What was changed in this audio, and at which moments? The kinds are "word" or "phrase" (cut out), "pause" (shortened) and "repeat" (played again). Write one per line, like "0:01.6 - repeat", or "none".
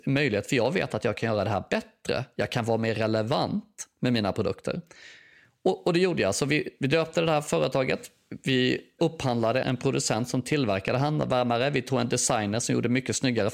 0:09.6 - word